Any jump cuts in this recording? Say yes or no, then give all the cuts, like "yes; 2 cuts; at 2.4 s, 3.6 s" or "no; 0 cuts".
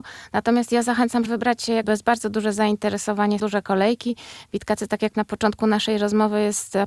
yes; 4 cuts; at 1.3 s, 1.8 s, 3.4 s, 5.1 s